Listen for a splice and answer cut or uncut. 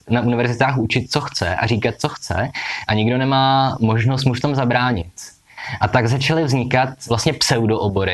uncut